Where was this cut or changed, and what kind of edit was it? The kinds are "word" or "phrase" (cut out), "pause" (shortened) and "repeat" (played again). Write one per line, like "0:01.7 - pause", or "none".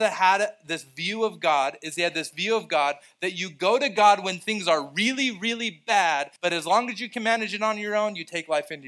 0:06.4 - pause